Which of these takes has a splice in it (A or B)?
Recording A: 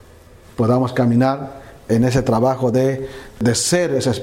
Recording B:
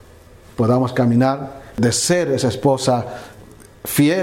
B